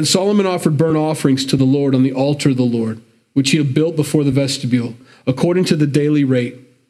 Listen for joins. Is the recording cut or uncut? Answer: uncut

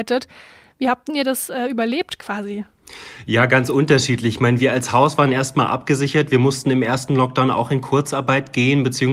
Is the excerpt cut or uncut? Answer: uncut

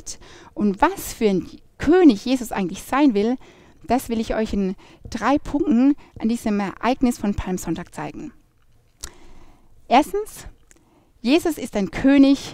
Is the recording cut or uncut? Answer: uncut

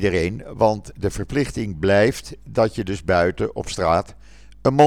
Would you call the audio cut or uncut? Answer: uncut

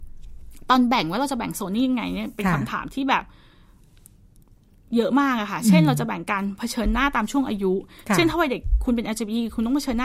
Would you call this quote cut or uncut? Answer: uncut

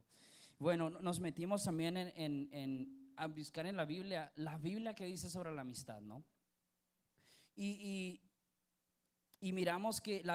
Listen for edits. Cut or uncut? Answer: uncut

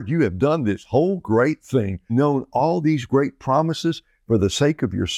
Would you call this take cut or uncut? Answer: cut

